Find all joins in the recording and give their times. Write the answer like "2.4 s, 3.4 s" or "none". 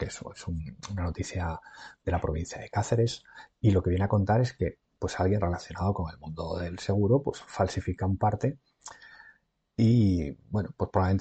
none